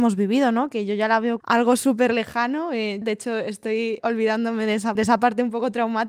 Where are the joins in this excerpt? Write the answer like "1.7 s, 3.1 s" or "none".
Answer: 1.4 s, 3.0 s, 4.0 s, 5.0 s